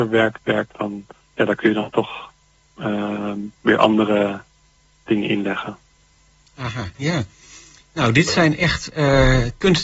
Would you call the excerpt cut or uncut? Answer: cut